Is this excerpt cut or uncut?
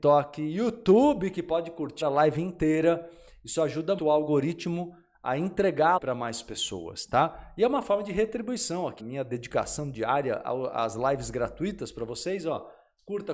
cut